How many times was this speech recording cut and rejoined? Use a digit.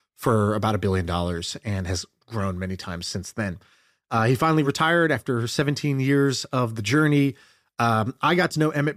0